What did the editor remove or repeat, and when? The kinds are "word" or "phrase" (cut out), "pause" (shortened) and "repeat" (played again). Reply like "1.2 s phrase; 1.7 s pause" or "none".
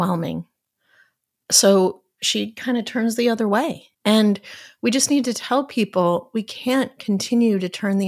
3.9 s pause